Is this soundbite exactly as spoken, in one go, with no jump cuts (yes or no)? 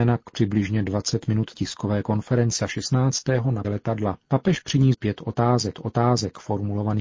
no